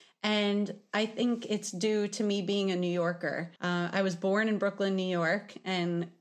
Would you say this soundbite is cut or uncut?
cut